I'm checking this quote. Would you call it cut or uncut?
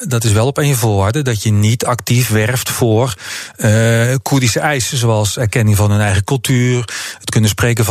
uncut